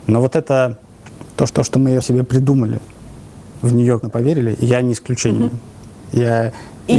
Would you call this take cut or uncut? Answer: cut